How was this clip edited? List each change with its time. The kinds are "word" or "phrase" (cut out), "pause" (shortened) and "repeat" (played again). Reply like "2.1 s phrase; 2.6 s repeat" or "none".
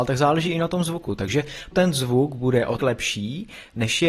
1.7 s word; 2.8 s word